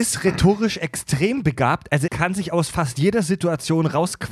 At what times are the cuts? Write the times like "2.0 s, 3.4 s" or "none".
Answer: 2.1 s